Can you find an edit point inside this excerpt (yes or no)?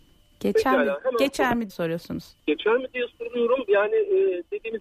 yes